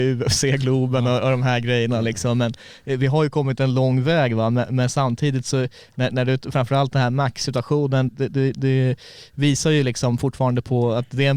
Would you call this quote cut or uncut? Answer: cut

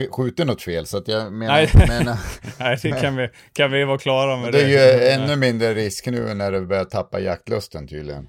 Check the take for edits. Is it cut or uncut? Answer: uncut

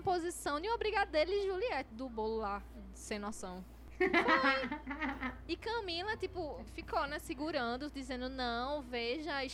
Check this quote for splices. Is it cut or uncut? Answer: uncut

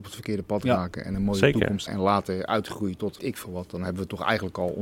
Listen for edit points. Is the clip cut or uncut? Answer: cut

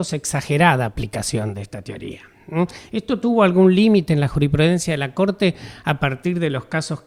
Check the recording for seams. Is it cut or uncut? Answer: uncut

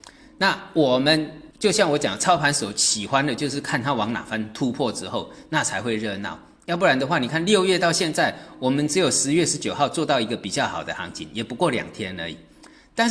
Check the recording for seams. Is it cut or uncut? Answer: cut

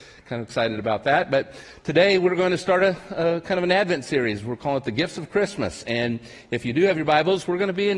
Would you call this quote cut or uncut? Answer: uncut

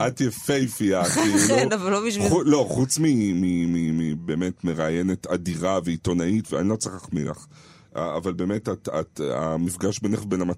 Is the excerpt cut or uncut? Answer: uncut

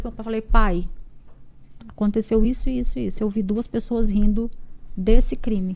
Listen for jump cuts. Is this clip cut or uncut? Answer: uncut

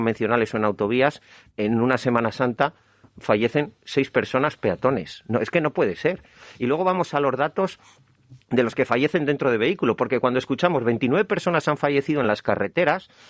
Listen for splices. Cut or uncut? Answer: uncut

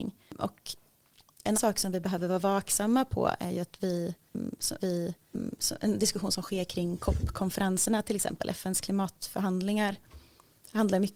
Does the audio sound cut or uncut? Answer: cut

